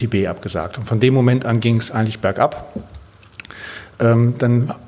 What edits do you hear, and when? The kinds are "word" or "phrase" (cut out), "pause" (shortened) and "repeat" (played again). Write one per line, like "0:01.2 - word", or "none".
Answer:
none